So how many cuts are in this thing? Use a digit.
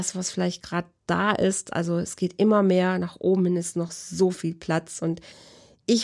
0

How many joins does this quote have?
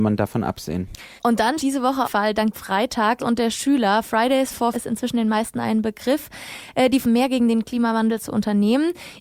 7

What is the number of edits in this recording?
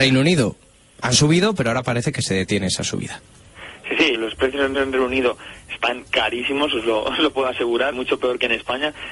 3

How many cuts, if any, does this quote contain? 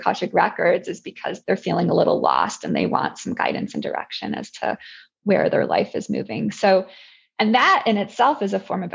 1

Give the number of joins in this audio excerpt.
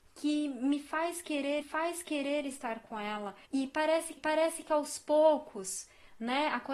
3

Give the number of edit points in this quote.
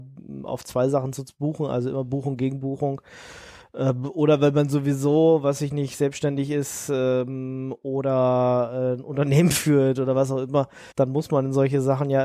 1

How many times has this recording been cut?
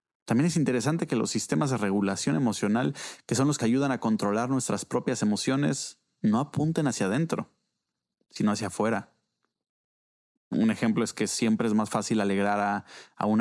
1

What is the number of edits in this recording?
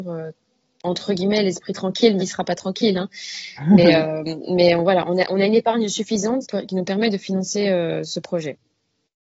2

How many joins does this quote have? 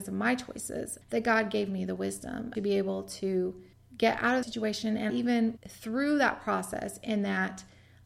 6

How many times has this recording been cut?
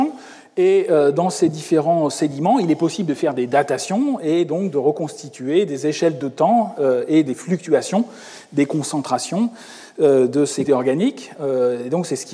2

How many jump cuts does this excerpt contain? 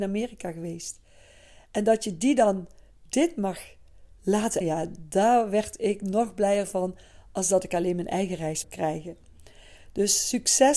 2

